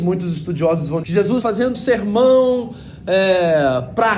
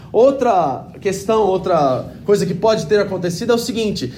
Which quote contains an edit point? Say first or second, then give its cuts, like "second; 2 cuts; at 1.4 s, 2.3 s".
first; 3 cuts; at 1.0 s, 1.4 s, 1.7 s